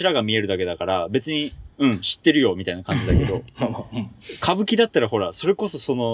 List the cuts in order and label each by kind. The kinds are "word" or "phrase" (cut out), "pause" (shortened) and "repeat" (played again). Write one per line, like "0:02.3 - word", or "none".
0:01.7 - pause